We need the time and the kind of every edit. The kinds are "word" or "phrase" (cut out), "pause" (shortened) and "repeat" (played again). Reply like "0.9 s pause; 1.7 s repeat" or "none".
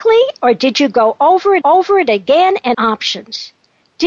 1.6 s repeat; 2.7 s phrase

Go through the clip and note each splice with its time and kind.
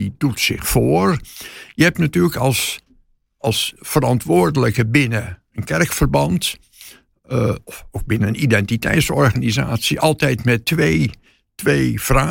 none

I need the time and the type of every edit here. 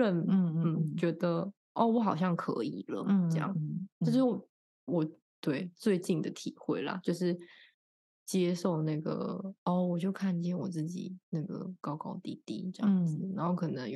none

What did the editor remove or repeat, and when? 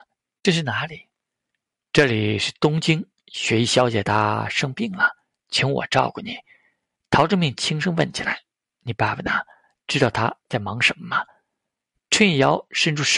none

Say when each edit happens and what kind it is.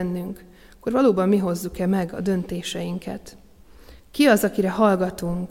4.0 s pause

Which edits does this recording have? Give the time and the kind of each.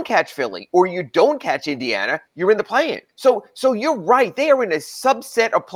2.3 s pause; 3.1 s pause

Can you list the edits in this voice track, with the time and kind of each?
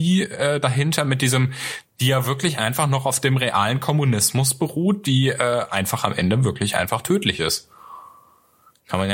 none

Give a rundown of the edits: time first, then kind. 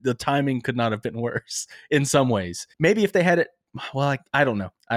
2.7 s pause

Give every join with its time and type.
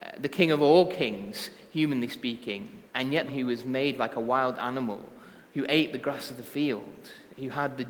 2.9 s pause; 3.3 s phrase; 5.4 s word

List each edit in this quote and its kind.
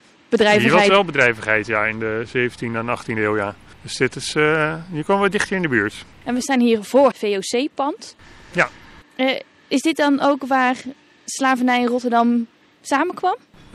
3.7 s pause; 6.1 s pause; 7.1 s word

